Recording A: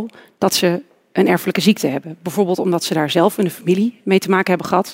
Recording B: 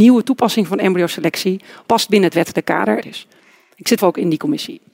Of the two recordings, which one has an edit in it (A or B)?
B